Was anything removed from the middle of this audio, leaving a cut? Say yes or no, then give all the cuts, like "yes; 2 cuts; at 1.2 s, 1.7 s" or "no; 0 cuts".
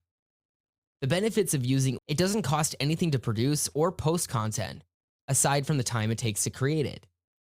yes; 1 cut; at 2.0 s